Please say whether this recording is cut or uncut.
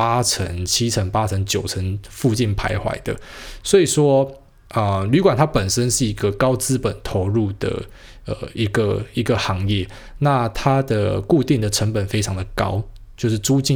uncut